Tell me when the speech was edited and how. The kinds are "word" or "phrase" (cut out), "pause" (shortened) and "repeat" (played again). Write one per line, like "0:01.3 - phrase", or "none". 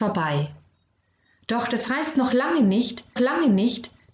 0:03.2 - repeat